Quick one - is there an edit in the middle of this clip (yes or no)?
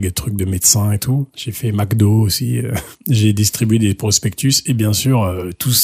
no